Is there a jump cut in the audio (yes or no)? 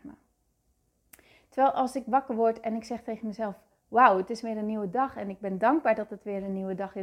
no